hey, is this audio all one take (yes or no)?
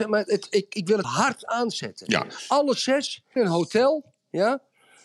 no